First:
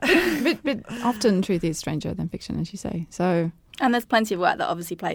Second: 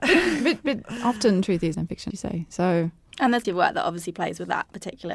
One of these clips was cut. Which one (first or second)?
second